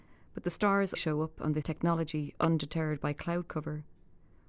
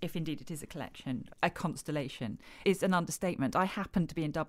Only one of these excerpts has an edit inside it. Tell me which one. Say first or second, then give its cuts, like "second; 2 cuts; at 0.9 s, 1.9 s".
first; 2 cuts; at 0.9 s, 1.6 s